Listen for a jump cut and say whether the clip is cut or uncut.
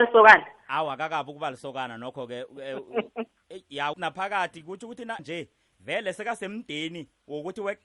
cut